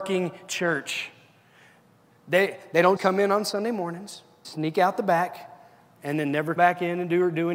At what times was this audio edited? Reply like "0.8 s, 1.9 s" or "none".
3.0 s, 4.4 s, 6.6 s